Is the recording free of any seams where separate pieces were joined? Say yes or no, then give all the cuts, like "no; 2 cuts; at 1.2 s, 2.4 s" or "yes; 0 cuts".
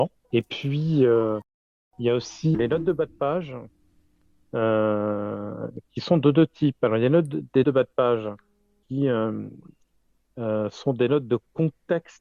no; 3 cuts; at 2.5 s, 7.6 s, 8.8 s